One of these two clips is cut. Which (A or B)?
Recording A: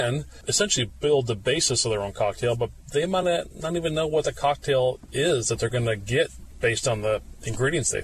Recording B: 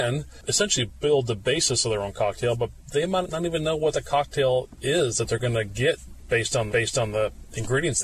B